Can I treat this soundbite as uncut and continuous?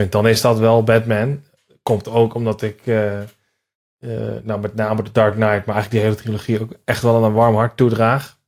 yes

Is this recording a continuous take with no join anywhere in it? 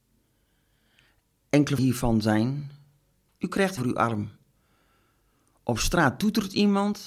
no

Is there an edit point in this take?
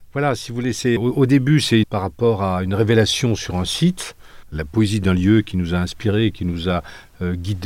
yes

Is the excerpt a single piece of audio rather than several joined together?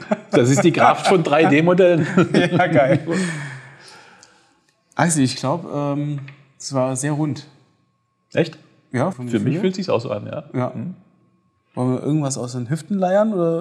no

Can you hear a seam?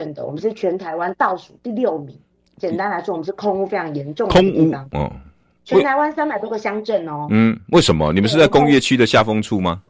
no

